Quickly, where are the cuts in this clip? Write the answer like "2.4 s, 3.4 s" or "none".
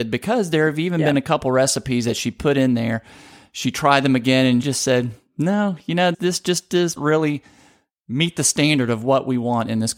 4.6 s, 6.1 s, 7.0 s